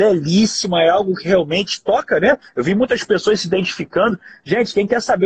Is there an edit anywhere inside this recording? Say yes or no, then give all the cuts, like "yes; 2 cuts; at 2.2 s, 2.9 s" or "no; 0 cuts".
no; 0 cuts